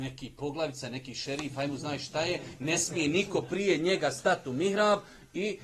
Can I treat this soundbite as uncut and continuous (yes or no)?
yes